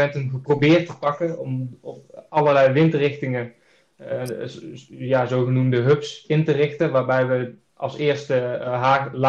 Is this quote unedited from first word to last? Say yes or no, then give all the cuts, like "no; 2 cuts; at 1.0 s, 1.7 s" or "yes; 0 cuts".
no; 1 cut; at 7.7 s